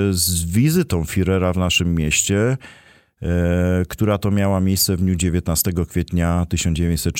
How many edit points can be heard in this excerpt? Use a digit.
0